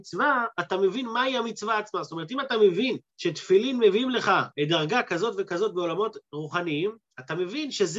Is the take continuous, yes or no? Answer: no